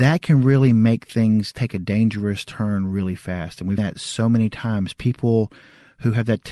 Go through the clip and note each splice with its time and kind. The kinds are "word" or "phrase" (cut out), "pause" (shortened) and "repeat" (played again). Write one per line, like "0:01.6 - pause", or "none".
0:03.8 - word